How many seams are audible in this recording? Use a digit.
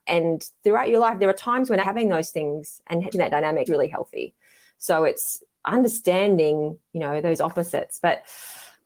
3